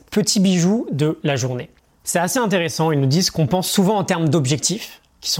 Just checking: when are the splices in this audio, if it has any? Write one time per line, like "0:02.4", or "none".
none